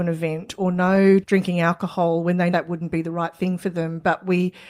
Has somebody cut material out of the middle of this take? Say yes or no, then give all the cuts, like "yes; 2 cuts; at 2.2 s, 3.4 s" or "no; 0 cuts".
yes; 2 cuts; at 1.2 s, 2.5 s